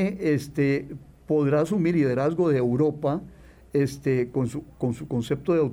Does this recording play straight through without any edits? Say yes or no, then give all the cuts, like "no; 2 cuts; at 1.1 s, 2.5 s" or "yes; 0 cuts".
no; 1 cut; at 1.9 s